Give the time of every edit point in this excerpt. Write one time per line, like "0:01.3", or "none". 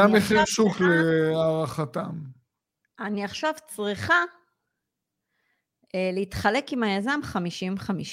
none